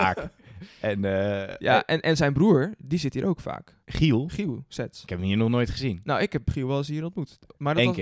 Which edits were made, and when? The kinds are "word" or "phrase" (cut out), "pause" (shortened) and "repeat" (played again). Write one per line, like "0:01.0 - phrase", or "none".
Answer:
0:03.8 - pause

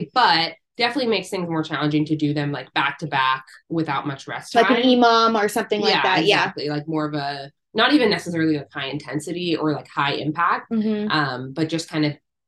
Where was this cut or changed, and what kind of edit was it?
none

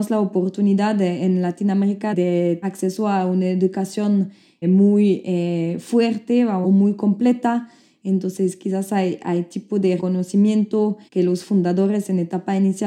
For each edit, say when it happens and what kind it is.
0:02.1 - word
0:02.6 - word
0:04.6 - word
0:06.6 - phrase
0:10.0 - phrase
0:11.1 - pause

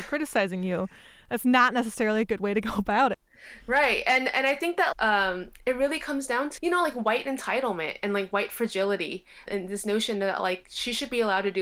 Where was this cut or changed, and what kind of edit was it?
0:03.1 - word
0:04.9 - word
0:06.6 - word
0:09.5 - word

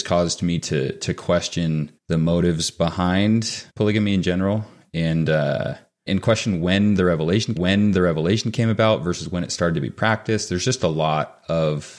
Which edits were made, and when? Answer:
0:02.0 - pause
0:03.7 - pause
0:06.1 - word
0:07.6 - repeat

